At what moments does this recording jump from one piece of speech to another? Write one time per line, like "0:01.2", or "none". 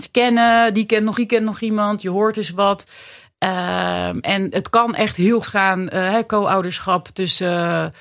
0:01.1
0:05.4